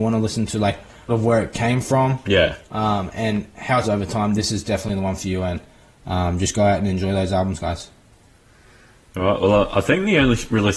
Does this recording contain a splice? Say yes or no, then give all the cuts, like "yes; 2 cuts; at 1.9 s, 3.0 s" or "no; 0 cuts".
yes; 2 cuts; at 1.1 s, 3.8 s